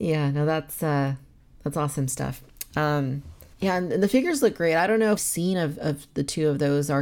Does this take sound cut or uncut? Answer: cut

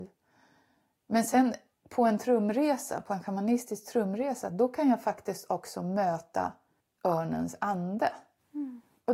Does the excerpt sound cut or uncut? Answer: uncut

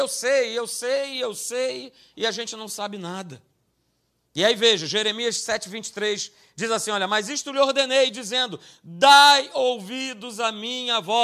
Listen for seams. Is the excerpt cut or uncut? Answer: uncut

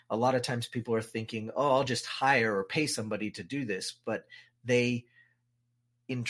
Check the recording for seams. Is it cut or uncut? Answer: uncut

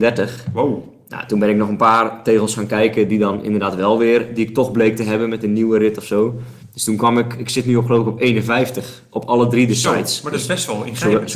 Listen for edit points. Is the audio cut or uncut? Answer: uncut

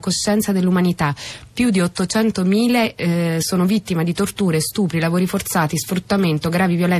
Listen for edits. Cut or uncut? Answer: uncut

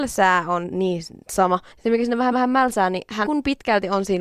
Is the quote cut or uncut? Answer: cut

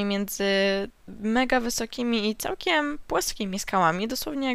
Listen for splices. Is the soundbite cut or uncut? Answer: uncut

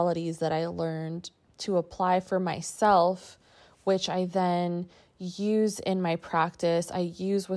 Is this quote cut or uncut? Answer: uncut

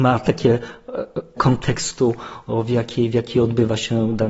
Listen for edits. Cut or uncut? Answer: cut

